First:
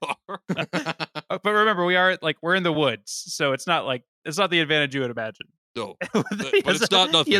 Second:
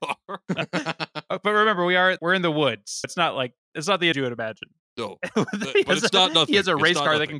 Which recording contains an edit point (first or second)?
second